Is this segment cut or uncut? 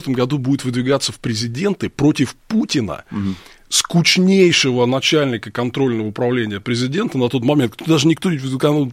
uncut